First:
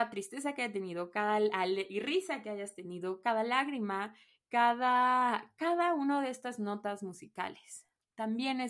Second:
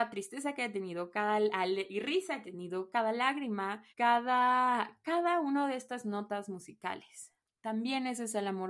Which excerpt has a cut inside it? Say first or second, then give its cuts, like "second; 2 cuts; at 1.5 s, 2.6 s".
second; 2 cuts; at 2.4 s, 3.9 s